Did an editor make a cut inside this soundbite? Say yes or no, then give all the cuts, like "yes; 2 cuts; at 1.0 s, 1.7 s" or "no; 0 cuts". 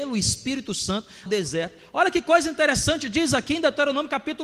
yes; 1 cut; at 1.3 s